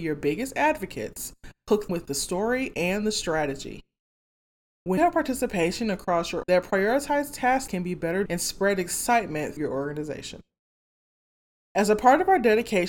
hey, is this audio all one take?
no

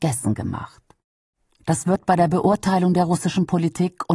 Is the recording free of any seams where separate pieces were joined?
yes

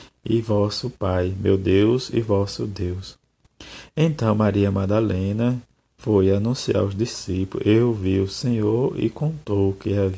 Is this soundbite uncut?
yes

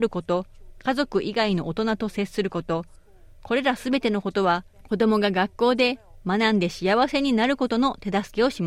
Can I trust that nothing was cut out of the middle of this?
yes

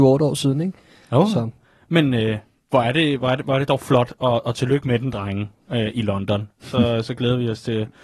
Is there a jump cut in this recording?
no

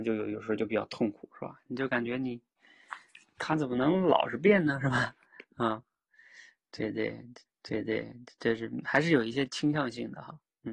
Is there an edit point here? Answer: yes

